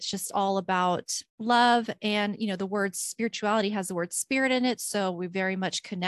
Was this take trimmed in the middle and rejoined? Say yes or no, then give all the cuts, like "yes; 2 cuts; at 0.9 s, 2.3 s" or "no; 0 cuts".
yes; 1 cut; at 1.3 s